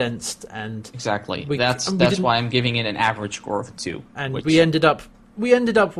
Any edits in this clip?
no; 0 cuts

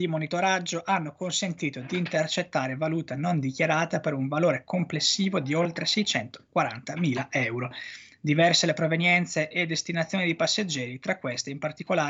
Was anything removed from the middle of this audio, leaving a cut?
no; 0 cuts

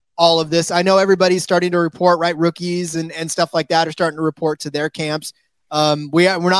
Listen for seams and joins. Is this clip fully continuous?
yes; 0 cuts

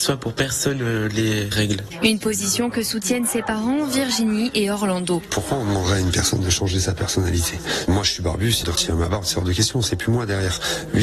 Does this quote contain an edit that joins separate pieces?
yes; 1 cut; at 8.6 s

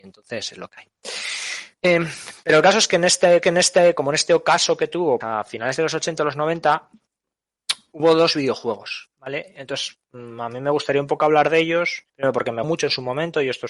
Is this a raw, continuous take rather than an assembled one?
no; 5 cuts; at 1.7 s, 3.4 s, 5.2 s, 12.1 s, 12.6 s

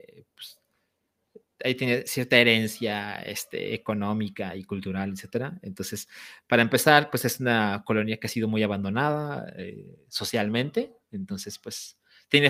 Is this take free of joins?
no; 1 cut; at 11.0 s

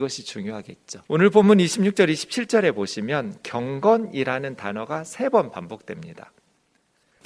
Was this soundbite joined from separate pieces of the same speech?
yes; 1 cut; at 1.0 s

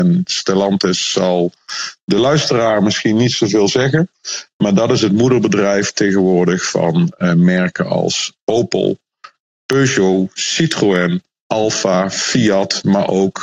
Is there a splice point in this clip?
no; 0 cuts

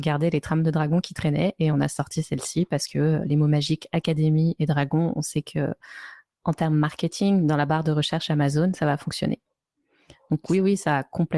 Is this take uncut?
yes; 0 cuts

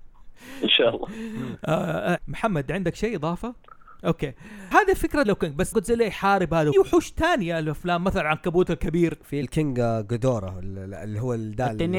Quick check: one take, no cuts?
no; 6 cuts; at 2.2 s, 4.7 s, 5.2 s, 5.7 s, 6.7 s, 9.4 s

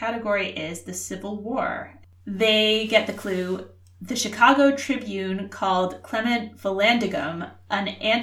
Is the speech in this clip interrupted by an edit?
no; 0 cuts

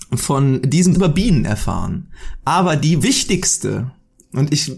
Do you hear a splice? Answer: yes; 2 cuts; at 0.9 s, 3.0 s

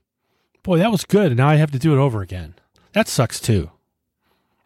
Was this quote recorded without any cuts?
yes; 0 cuts

